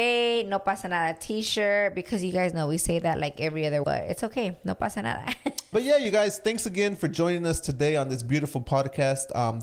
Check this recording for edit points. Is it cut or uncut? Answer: cut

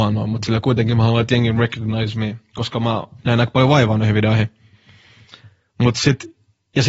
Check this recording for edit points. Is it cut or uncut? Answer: uncut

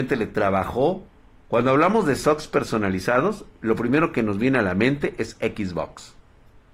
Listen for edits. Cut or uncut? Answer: uncut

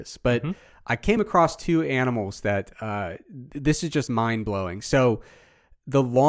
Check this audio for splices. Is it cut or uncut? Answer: uncut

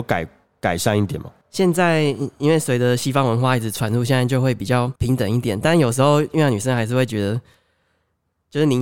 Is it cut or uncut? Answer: cut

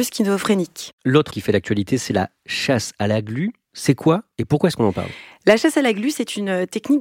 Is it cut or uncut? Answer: cut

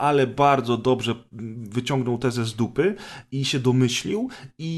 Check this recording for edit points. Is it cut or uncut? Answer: uncut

